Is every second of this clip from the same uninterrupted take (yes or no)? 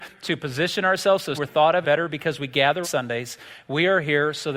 no